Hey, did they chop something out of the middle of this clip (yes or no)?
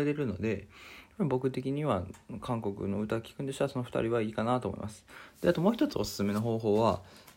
no